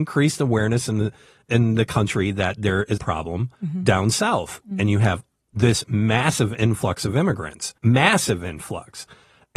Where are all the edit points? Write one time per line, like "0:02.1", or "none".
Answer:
0:01.5
0:03.0
0:03.5
0:07.8